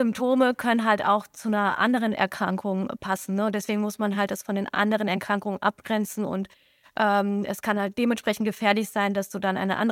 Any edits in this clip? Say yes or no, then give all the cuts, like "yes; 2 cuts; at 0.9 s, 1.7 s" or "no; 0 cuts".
no; 0 cuts